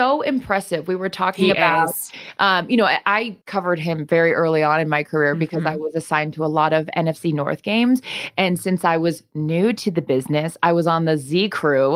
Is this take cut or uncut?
cut